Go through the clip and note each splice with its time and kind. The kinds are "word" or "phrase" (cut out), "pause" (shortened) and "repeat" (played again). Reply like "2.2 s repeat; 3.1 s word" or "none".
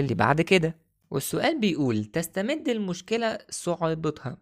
none